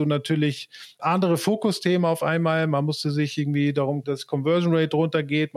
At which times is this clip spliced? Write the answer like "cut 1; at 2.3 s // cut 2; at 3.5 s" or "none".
cut 1; at 1.0 s // cut 2; at 4.0 s